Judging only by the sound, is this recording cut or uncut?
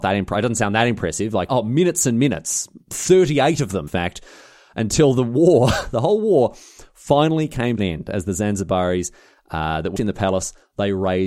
cut